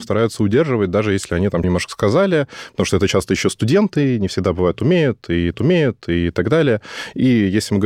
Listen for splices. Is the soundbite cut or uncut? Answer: cut